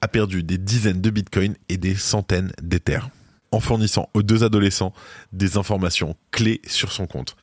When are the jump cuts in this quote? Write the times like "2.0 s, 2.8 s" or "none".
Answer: none